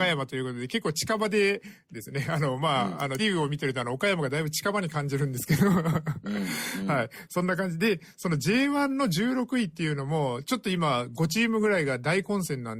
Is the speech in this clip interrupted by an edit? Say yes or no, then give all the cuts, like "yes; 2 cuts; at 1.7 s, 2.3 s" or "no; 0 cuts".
yes; 1 cut; at 3.2 s